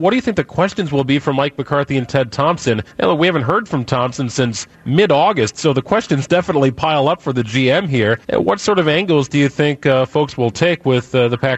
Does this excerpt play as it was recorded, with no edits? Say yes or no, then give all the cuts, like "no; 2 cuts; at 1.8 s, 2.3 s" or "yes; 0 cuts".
no; 3 cuts; at 2.9 s, 4.7 s, 8.2 s